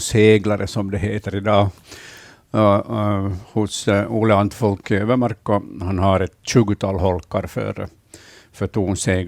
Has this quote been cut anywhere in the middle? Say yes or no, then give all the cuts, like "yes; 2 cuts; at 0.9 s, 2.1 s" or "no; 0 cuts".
no; 0 cuts